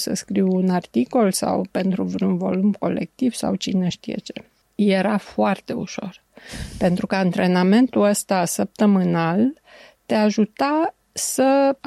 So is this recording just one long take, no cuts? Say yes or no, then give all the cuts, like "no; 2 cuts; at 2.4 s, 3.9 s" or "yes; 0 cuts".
yes; 0 cuts